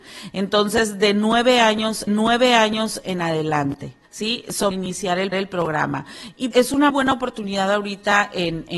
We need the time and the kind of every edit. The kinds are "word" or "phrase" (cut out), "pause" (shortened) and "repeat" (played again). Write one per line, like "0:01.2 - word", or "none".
0:02.1 - repeat
0:04.0 - pause
0:04.7 - phrase
0:05.3 - repeat
0:06.5 - word
0:06.9 - word